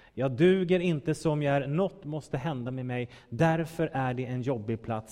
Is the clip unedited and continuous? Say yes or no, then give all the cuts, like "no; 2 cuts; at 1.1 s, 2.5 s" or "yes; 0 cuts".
yes; 0 cuts